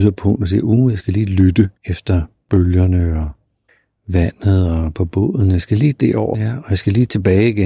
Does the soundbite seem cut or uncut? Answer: cut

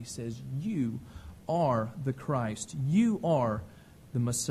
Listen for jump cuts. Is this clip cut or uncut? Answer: uncut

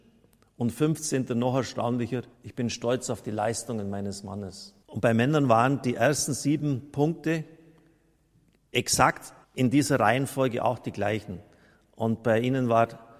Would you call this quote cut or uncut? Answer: cut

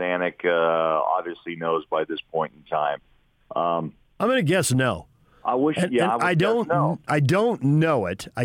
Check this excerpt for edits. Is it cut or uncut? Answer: uncut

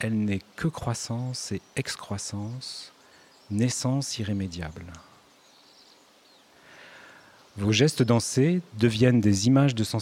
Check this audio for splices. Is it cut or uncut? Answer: uncut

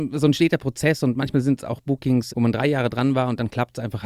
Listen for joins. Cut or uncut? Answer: cut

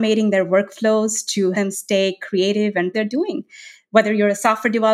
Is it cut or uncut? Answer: cut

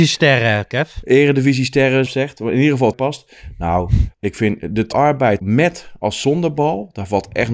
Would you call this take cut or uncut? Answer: cut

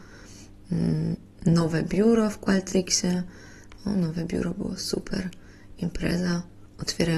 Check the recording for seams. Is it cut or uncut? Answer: cut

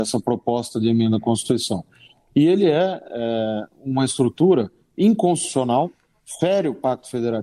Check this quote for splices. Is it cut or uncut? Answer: uncut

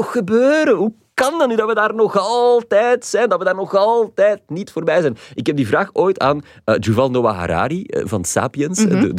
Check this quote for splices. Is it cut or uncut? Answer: uncut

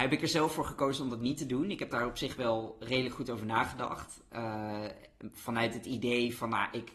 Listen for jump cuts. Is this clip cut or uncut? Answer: uncut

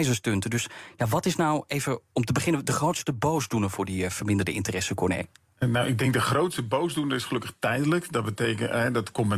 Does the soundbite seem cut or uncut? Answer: uncut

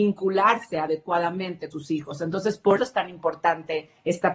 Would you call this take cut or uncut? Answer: cut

